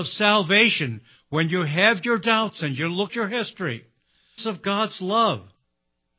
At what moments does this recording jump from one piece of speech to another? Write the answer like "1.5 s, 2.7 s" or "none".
3.1 s, 4.4 s